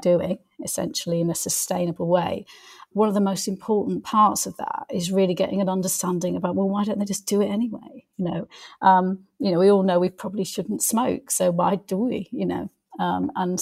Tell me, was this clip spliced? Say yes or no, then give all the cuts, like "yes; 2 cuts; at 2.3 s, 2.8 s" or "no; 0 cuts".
no; 0 cuts